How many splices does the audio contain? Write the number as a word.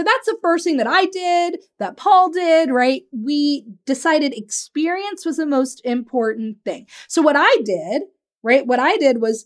zero